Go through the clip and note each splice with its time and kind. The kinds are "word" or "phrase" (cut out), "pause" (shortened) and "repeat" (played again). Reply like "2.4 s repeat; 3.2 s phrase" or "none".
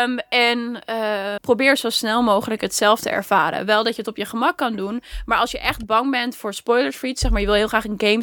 1.4 s word